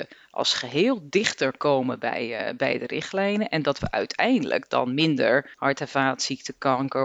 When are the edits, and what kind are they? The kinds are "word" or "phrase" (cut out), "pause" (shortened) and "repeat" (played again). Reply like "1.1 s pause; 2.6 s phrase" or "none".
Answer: 5.5 s pause